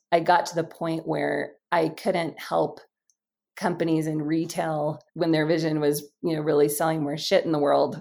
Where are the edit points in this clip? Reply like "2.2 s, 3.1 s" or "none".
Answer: 5.1 s